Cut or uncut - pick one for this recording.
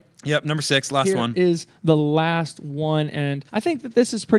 cut